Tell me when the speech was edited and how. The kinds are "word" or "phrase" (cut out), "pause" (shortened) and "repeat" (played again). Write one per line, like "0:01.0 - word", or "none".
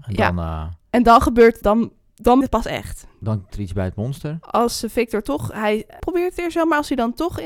0:01.6 - word
0:02.4 - word
0:03.5 - word
0:06.0 - word